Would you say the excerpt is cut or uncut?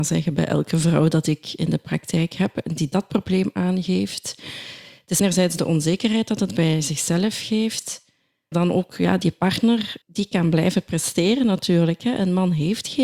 cut